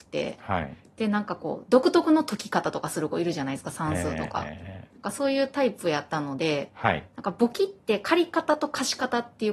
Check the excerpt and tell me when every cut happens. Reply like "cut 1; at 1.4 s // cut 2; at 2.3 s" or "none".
none